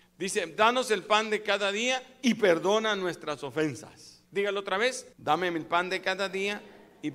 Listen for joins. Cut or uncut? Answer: cut